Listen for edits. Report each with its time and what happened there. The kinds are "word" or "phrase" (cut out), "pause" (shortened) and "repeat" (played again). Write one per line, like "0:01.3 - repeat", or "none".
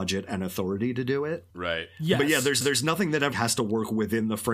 0:01.5 - pause
0:02.6 - repeat
0:03.3 - word